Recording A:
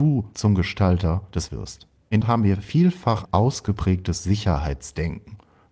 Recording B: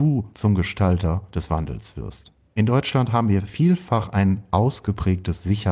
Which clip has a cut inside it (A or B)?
A